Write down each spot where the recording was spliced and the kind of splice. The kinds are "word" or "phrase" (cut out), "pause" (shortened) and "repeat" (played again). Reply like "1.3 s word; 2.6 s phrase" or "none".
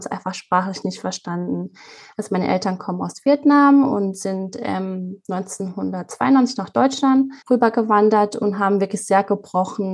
7.4 s pause